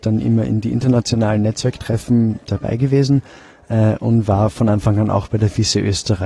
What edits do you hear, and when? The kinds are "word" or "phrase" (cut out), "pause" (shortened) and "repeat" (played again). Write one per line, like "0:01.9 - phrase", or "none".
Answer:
none